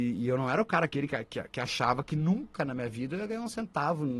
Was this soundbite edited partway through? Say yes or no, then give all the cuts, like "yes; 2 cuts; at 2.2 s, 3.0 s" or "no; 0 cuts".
no; 0 cuts